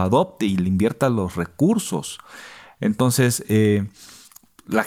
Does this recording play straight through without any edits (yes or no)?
yes